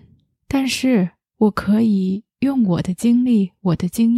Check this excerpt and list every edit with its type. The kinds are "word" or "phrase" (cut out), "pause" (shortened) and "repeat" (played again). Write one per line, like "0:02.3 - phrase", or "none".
none